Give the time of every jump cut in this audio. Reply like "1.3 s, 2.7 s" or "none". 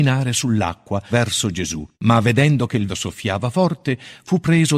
1.1 s, 1.9 s, 2.9 s